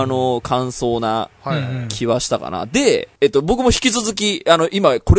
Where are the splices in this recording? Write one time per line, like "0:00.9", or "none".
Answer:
0:03.2